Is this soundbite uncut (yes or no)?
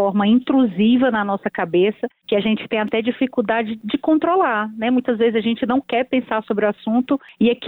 yes